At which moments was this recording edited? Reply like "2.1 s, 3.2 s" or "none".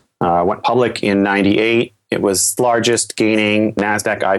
2.6 s